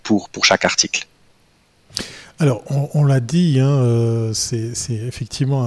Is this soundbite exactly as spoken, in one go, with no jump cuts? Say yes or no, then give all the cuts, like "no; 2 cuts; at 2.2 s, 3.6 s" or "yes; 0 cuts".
yes; 0 cuts